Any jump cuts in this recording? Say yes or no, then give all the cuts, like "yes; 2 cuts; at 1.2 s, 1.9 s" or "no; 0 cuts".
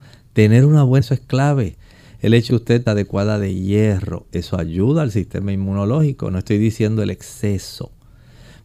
yes; 3 cuts; at 1.0 s, 2.5 s, 2.9 s